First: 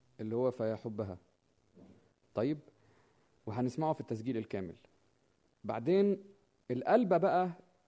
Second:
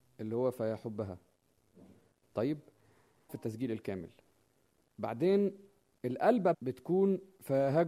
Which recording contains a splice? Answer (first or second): second